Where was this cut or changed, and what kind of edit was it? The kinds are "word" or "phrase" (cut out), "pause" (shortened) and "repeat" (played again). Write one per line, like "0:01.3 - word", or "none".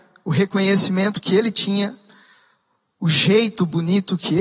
none

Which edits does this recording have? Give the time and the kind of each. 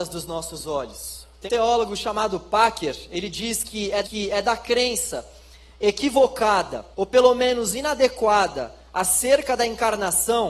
0:01.5 - word
0:04.0 - repeat
0:06.9 - pause

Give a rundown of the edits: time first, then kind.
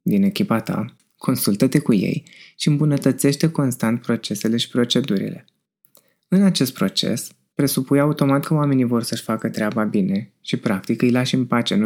none

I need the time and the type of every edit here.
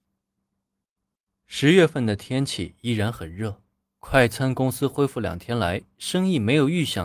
none

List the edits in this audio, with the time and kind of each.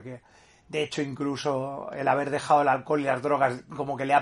none

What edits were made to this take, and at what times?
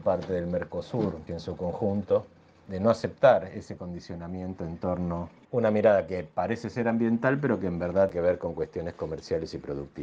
0:01.3 - word
0:05.4 - word
0:08.1 - word

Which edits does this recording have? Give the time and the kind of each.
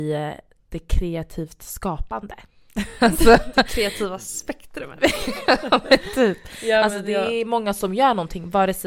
none

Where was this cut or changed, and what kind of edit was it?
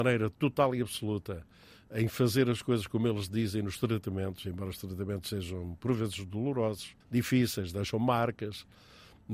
0:07.0 - pause

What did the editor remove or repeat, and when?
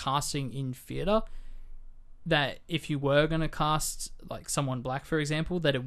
none

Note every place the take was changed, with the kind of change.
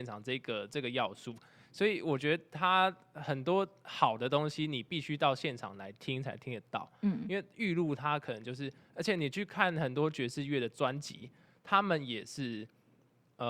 none

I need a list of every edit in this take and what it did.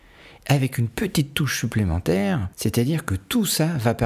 0:02.5 - pause

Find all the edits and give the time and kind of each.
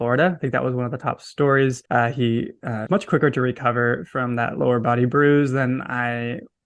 0:01.8 - pause
0:02.9 - word

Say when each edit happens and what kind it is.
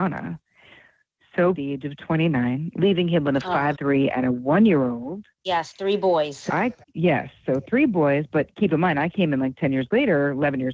0:01.5 - phrase
0:03.7 - word
0:05.3 - pause
0:06.5 - word
0:06.8 - pause

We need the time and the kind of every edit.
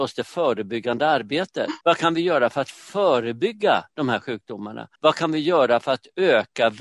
0:01.8 - pause
0:04.9 - pause

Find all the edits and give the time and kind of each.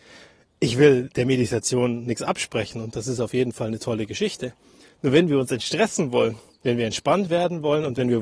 none

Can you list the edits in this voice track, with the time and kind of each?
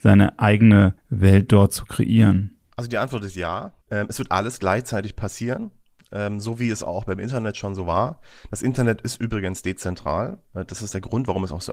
0:01.0 - pause
0:02.6 - pause
0:03.8 - pause

